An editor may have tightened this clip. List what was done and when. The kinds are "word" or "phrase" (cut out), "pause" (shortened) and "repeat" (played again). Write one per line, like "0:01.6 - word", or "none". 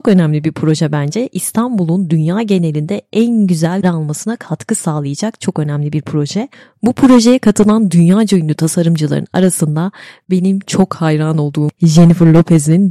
0:03.8 - phrase